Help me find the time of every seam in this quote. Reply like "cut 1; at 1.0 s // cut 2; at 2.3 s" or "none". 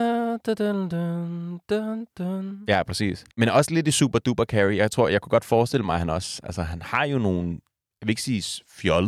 cut 1; at 3.3 s